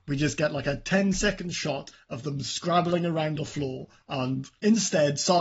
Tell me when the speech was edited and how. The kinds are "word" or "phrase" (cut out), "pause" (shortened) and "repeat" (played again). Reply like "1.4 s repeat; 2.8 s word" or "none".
3.4 s word